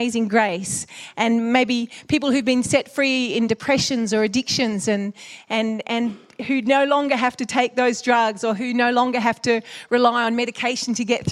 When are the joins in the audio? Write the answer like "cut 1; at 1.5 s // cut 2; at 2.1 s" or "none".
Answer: none